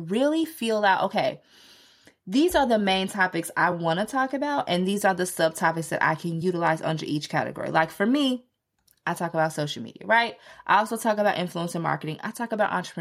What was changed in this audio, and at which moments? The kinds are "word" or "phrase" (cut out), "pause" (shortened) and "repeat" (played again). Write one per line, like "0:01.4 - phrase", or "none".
none